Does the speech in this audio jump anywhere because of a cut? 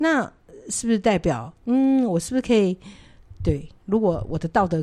yes; 1 cut; at 1.5 s

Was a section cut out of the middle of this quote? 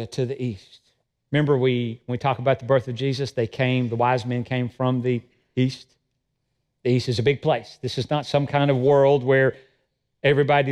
yes; 1 cut; at 1.0 s

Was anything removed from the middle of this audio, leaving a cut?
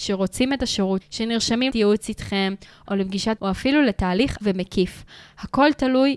yes; 5 cuts; at 1.0 s, 1.7 s, 2.9 s, 3.4 s, 4.4 s

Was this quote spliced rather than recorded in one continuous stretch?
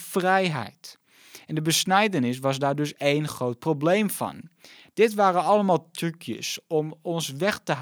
no; 0 cuts

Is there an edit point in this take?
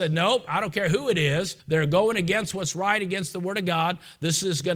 yes; 1 cut; at 1.6 s

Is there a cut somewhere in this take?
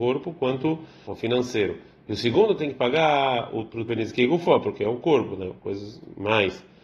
yes; 2 cuts; at 1.1 s, 3.9 s

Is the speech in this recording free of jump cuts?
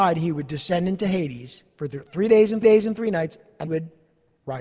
no; 2 cuts; at 2.6 s, 3.7 s

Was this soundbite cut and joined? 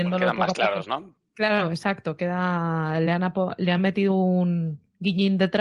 no; 0 cuts

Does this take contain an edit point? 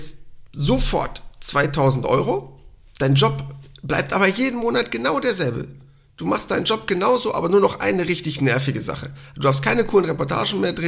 no; 0 cuts

